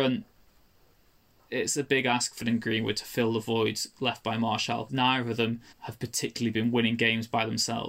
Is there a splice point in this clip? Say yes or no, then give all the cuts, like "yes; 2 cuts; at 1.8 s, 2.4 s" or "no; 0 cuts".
yes; 3 cuts; at 2.4 s, 4.9 s, 5.7 s